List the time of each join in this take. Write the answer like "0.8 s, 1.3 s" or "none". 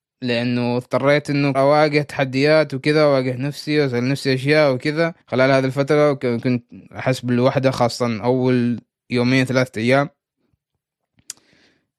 1.5 s, 5.2 s, 6.9 s